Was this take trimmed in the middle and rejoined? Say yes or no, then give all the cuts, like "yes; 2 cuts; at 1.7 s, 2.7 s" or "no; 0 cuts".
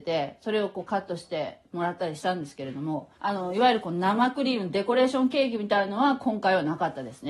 yes; 1 cut; at 3.1 s